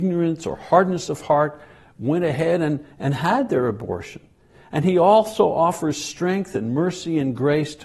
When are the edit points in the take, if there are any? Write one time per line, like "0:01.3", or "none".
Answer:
none